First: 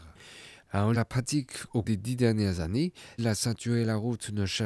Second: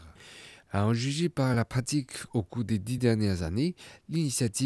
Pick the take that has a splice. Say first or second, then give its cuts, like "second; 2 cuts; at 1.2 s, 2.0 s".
first; 3 cuts; at 0.9 s, 1.8 s, 3.2 s